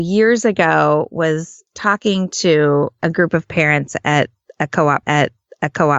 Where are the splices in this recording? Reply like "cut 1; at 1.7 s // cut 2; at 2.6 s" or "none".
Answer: cut 1; at 1.7 s // cut 2; at 5.0 s

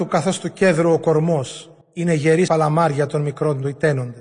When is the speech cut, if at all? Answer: cut 1; at 1.8 s // cut 2; at 2.5 s

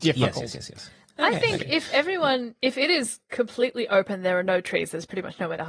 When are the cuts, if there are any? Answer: none

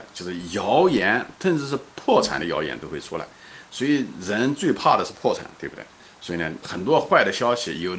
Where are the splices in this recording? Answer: cut 1; at 6.6 s

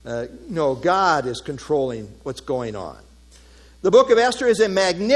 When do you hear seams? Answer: none

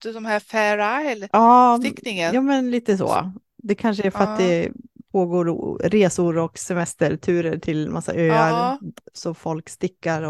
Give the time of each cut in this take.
none

